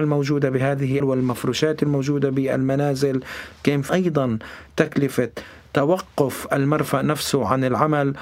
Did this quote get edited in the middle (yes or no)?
yes